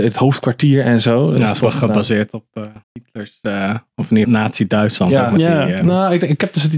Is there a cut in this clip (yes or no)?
yes